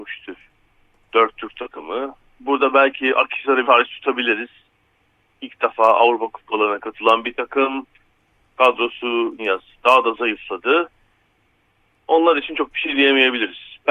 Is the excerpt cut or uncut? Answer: cut